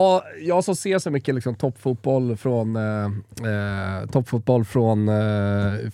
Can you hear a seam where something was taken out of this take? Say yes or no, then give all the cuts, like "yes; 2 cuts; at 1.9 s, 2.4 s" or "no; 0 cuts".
no; 0 cuts